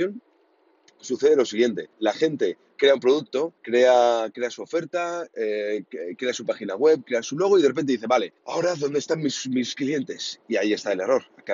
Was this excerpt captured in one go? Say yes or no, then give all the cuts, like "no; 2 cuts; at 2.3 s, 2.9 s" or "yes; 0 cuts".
no; 3 cuts; at 1.9 s, 3.6 s, 8.4 s